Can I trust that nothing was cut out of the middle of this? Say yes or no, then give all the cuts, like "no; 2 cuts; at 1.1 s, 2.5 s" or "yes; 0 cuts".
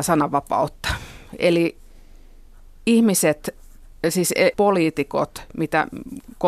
no; 1 cut; at 4.5 s